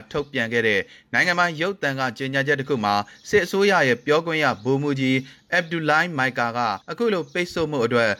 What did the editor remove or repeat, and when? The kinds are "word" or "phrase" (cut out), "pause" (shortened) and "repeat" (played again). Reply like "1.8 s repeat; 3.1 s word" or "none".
6.8 s pause

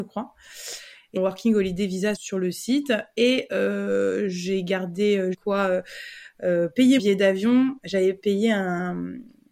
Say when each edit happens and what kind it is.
1.2 s phrase; 2.1 s word; 5.3 s phrase; 7.0 s word

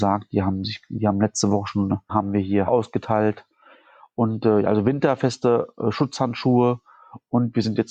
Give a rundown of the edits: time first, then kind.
2.1 s word; 2.7 s word

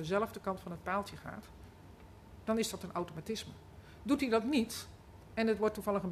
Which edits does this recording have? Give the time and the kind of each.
none

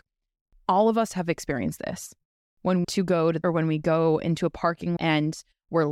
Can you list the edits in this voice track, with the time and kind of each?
2.8 s phrase; 3.4 s word; 5.0 s word

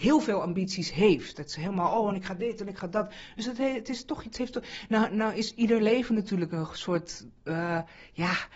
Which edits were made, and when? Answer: none

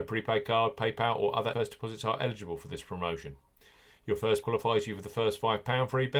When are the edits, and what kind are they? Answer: 1.5 s word; 4.4 s word

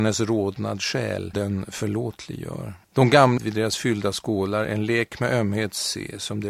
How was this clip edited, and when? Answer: 1.3 s word; 2.8 s pause; 3.4 s word

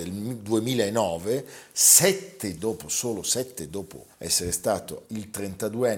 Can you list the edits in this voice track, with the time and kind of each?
2.6 s word; 3.7 s word; 5.0 s word

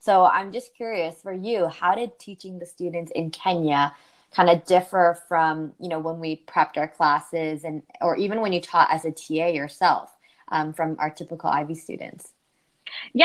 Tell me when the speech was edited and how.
none

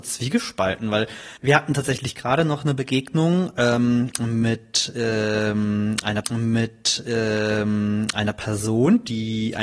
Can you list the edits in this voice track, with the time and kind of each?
1.4 s pause; 6.2 s repeat

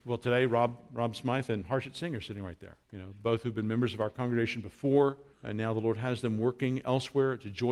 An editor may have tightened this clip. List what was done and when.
2.8 s pause; 5.3 s pause

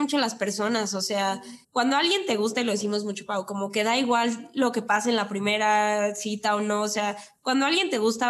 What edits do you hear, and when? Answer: 1.6 s pause

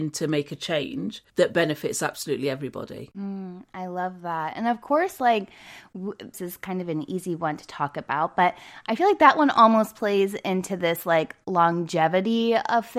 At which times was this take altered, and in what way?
1.3 s pause; 6.3 s word

